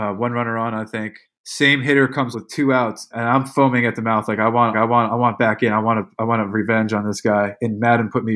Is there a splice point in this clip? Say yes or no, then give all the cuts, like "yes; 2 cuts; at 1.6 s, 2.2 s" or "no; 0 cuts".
yes; 4 cuts; at 1.2 s, 2.3 s, 3.1 s, 4.7 s